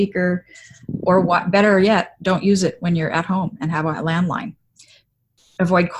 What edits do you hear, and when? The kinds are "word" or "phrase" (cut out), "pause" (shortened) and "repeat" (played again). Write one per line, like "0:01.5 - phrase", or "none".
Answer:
none